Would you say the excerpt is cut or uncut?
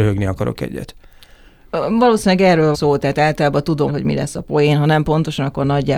cut